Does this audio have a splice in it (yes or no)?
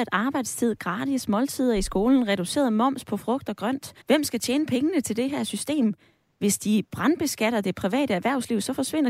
yes